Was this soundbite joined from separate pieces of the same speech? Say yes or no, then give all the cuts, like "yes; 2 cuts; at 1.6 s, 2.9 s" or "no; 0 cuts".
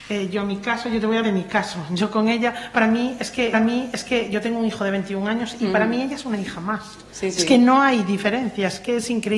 yes; 2 cuts; at 1.2 s, 3.5 s